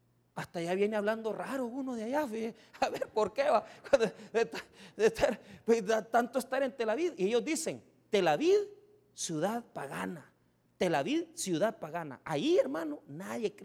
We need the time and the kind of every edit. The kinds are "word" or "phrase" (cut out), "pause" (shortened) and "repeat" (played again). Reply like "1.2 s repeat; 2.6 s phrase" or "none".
none